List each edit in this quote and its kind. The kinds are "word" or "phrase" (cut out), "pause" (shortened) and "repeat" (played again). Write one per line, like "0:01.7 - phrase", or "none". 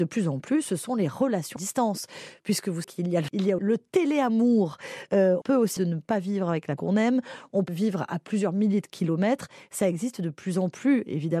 0:01.6 - word
0:02.8 - word
0:03.3 - word
0:03.6 - word
0:05.4 - word
0:05.8 - word
0:06.8 - word
0:07.7 - word